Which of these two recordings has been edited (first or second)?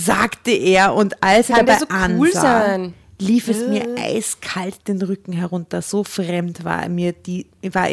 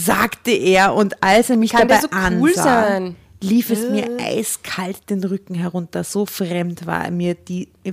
first